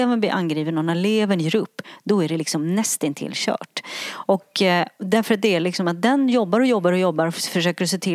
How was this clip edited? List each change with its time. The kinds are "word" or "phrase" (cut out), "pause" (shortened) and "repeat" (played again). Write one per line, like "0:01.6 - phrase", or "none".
none